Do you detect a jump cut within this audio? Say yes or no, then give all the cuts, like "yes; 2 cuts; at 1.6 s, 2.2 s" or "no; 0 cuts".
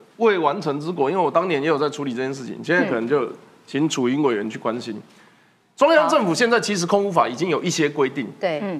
no; 0 cuts